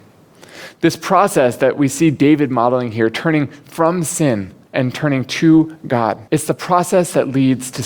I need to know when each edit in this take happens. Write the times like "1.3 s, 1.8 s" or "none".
4.6 s, 6.3 s